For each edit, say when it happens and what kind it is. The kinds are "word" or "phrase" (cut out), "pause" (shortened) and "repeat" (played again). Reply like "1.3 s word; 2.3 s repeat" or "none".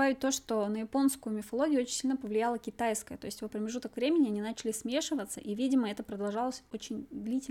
3.5 s word